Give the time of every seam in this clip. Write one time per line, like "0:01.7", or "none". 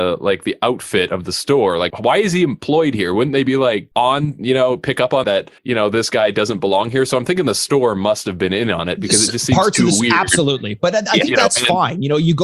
0:01.9
0:03.9
0:05.2
0:05.6